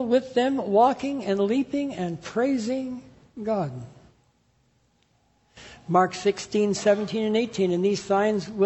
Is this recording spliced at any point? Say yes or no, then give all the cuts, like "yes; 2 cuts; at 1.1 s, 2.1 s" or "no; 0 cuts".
no; 0 cuts